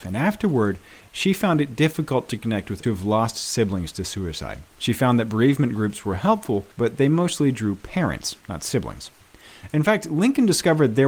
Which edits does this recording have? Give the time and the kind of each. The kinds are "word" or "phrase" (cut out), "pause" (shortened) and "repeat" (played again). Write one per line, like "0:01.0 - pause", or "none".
0:02.8 - word
0:04.7 - pause
0:06.7 - pause